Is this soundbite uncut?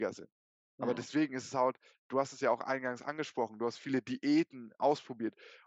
yes; 0 cuts

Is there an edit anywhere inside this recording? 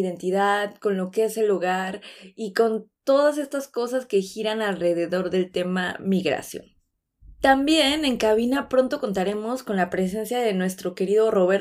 no; 0 cuts

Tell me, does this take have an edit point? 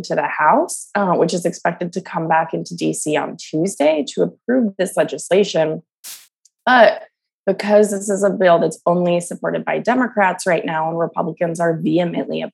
no; 0 cuts

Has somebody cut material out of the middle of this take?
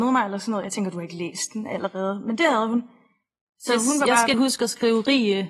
yes; 1 cut; at 4.3 s

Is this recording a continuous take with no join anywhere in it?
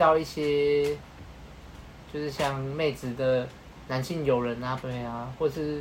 no; 1 cut; at 4.8 s

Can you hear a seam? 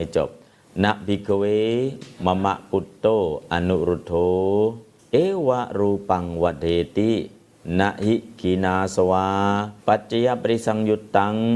yes; 2 cuts; at 5.0 s, 9.8 s

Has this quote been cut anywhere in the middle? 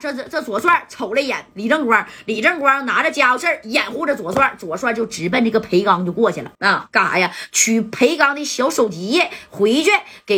yes; 1 cut; at 6.5 s

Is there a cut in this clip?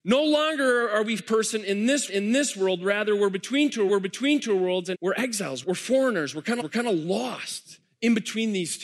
yes; 6 cuts; at 1.2 s, 2.1 s, 3.9 s, 4.9 s, 5.6 s, 6.6 s

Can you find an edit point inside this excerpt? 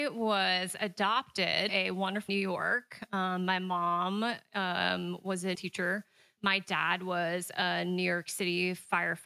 yes; 3 cuts; at 1.7 s, 2.3 s, 5.5 s

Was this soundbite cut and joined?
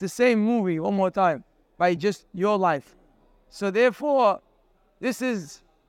no; 0 cuts

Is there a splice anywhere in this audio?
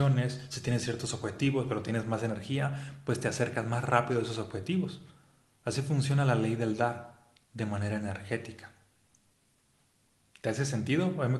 no; 0 cuts

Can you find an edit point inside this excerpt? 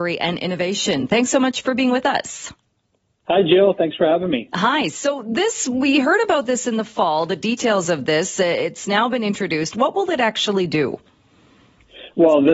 no; 0 cuts

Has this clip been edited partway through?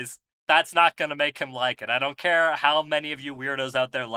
no; 0 cuts

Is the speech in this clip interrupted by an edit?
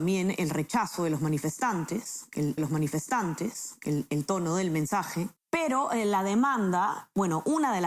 yes; 1 cut; at 2.6 s

